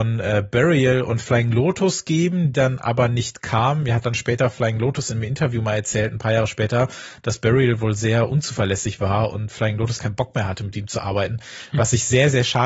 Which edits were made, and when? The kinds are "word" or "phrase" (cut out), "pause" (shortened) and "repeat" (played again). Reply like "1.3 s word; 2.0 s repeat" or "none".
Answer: 2.5 s word; 10.0 s word